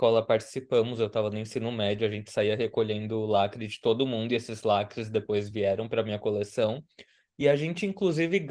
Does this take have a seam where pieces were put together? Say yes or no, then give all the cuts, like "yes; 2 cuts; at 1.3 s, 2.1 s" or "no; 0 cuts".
no; 0 cuts